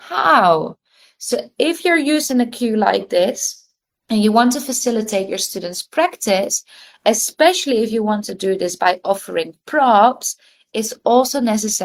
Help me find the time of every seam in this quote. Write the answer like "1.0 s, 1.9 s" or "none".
none

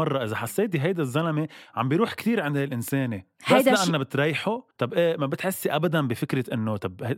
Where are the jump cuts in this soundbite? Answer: 4.7 s

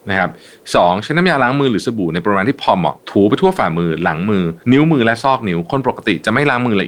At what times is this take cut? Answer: 3.0 s, 4.6 s

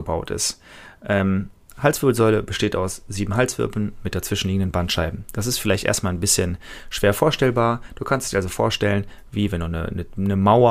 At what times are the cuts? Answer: none

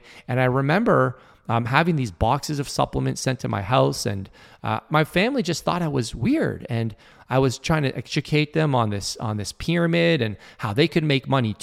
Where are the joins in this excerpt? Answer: 4.9 s

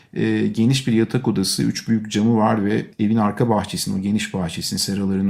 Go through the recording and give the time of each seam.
2.9 s

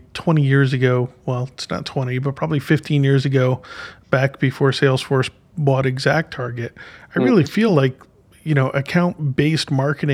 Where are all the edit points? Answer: none

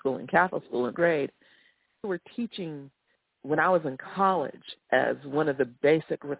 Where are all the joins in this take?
0.9 s, 2.0 s, 3.4 s, 4.9 s

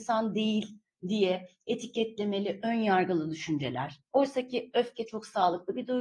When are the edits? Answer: 4.1 s

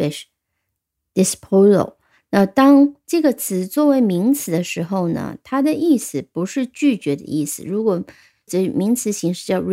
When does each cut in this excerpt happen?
8.5 s

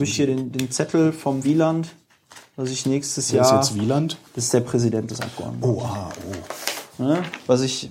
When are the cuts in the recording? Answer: 1.4 s

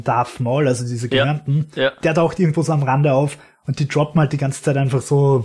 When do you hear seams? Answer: none

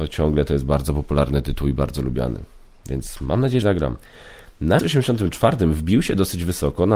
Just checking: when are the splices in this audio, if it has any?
3.6 s, 4.8 s

